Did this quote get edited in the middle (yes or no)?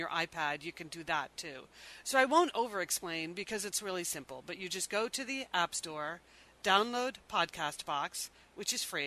no